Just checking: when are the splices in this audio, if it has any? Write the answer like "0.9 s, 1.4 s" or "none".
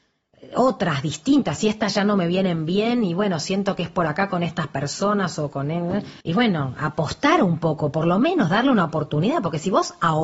6.2 s